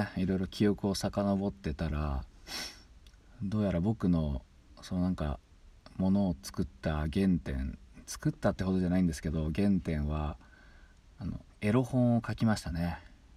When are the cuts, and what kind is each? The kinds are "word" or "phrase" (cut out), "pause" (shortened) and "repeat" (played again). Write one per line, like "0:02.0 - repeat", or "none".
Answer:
0:11.5 - pause